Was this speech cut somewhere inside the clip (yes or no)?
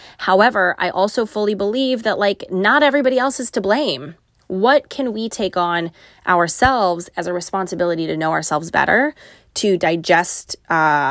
no